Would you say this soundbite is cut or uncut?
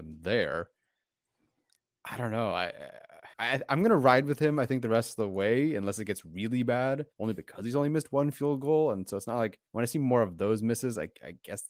cut